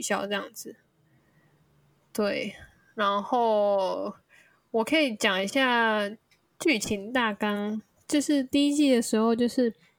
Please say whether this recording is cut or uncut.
uncut